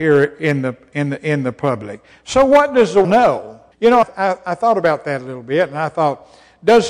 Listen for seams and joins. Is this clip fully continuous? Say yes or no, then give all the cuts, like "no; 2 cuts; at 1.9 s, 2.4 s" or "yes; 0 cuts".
no; 3 cuts; at 3.0 s, 3.7 s, 4.0 s